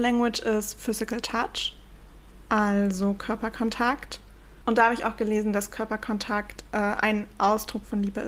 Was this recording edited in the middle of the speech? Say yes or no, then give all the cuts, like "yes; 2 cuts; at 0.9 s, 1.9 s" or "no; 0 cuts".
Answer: no; 0 cuts